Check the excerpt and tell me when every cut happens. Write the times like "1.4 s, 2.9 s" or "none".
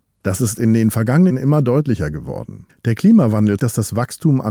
1.3 s, 2.7 s, 3.6 s